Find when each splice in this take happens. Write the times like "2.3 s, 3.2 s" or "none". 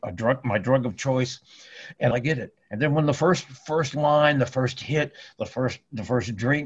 2.1 s